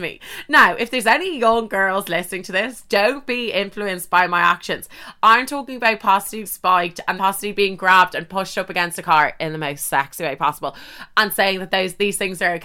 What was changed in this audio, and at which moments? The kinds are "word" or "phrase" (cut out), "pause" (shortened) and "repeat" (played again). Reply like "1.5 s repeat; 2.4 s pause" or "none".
6.5 s word; 7.2 s word